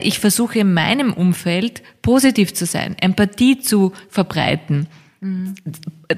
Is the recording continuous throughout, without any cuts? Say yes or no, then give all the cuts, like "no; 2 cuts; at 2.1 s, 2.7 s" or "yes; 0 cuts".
yes; 0 cuts